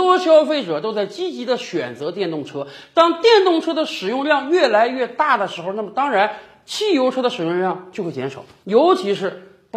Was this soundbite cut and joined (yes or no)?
no